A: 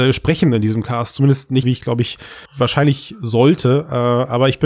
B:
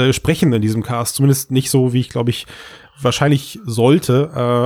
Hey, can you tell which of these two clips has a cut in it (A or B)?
A